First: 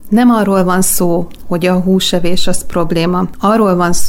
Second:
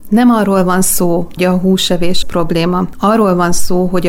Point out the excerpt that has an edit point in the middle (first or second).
second